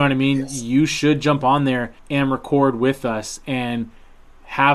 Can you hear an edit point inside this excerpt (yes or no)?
yes